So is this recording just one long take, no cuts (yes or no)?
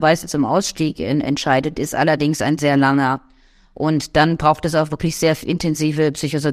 yes